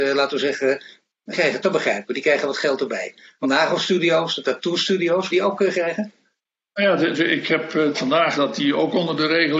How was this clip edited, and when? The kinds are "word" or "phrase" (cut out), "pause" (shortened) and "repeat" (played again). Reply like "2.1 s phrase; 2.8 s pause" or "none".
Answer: 1.3 s word; 1.6 s word; 3.4 s word; 5.3 s word; 5.7 s word; 7.1 s word; 7.9 s word; 8.4 s word

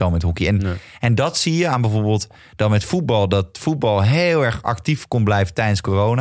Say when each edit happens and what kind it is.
none

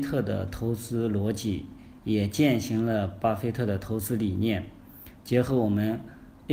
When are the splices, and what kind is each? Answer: none

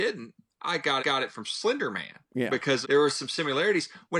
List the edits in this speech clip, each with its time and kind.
1.0 s repeat; 2.2 s pause; 2.8 s word

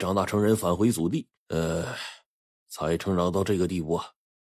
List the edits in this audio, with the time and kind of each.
1.4 s pause

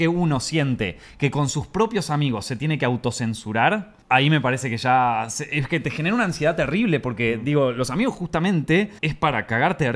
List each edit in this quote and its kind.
4.0 s pause; 9.0 s pause

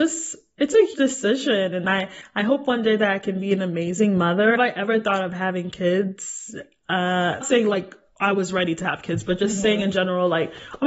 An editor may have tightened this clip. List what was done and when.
0.9 s word; 4.6 s phrase; 7.4 s phrase

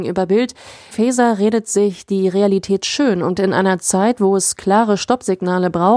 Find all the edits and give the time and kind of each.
0.9 s word; 3.3 s word

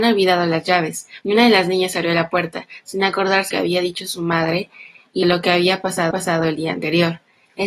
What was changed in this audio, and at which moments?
1.2 s pause; 3.5 s phrase; 5.2 s word; 6.1 s repeat

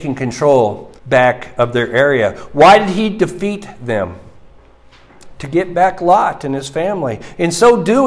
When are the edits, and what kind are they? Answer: 1.0 s pause

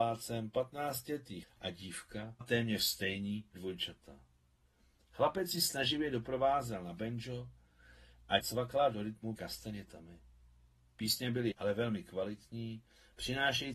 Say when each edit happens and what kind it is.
1.4 s word; 2.4 s word; 3.5 s word; 8.4 s word; 9.4 s word; 11.5 s word

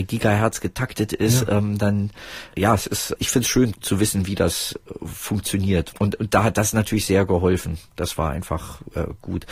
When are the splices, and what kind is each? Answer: 3.7 s word

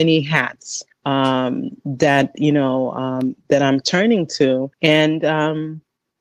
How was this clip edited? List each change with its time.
0.9 s pause; 4.7 s pause

